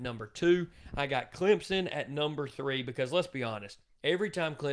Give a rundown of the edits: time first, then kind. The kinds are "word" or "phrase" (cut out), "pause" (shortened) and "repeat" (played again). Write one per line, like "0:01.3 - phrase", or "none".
none